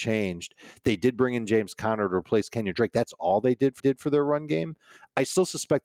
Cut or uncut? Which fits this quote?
cut